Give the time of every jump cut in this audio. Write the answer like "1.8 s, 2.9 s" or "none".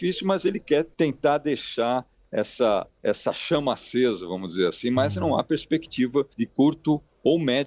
0.9 s, 2.9 s, 6.3 s

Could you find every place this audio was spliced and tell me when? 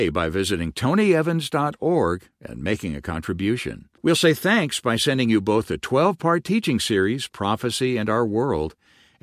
4.0 s

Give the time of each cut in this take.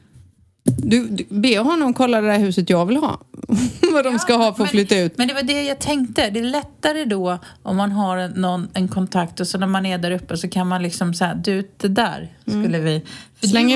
none

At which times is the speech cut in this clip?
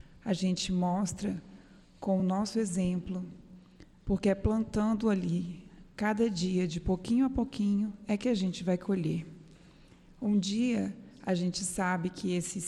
none

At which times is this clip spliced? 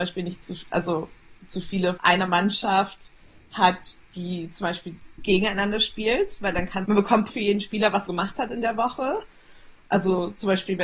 2.0 s, 6.9 s, 7.3 s, 8.1 s

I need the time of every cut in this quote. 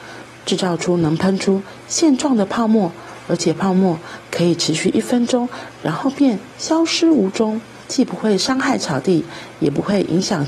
7.8 s

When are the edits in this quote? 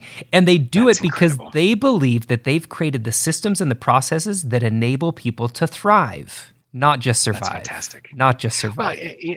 6.6 s

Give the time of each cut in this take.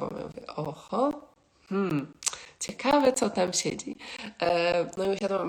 none

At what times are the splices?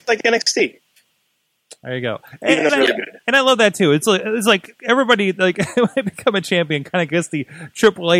2.7 s, 4.8 s

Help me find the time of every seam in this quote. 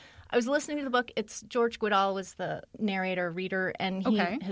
2.6 s

